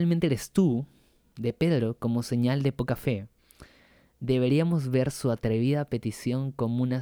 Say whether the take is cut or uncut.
uncut